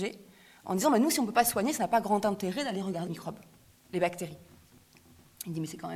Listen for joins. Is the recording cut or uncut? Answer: cut